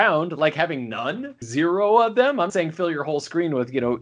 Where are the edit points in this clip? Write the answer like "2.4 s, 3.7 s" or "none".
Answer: 1.4 s, 2.5 s